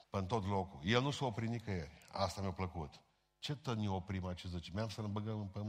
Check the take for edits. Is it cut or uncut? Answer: uncut